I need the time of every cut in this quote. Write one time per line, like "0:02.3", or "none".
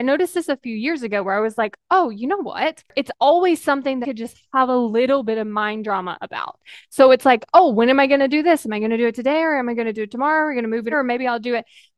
0:04.0
0:10.9